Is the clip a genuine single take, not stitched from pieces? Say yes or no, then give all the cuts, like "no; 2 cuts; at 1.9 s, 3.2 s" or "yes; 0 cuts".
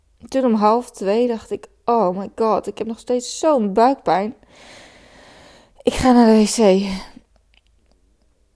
yes; 0 cuts